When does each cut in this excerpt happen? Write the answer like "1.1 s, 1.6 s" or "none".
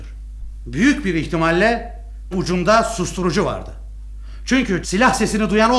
2.3 s, 4.8 s

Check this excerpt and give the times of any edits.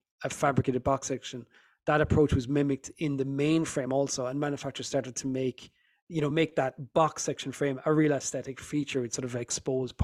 none

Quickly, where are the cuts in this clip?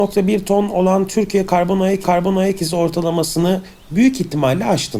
2.0 s

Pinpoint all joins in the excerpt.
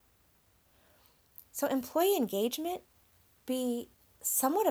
1.5 s, 3.4 s

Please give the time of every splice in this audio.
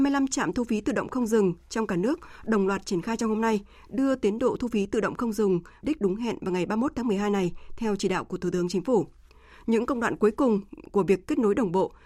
5.8 s

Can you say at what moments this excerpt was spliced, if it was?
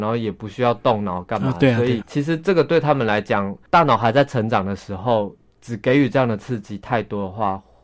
2.0 s

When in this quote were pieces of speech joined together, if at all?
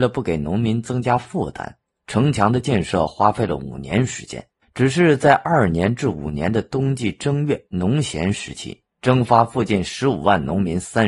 4.6 s, 8.9 s

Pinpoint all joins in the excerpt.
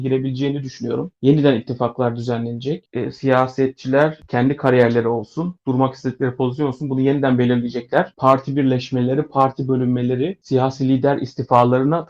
none

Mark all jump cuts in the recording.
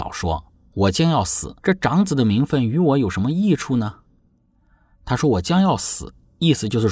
1.6 s

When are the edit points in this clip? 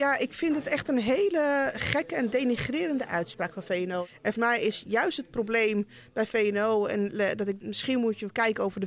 4.3 s, 7.6 s

